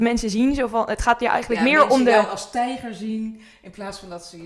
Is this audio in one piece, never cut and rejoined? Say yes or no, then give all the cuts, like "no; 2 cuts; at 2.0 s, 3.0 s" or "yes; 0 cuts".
yes; 0 cuts